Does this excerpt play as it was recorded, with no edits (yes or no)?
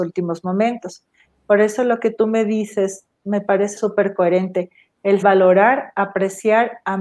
no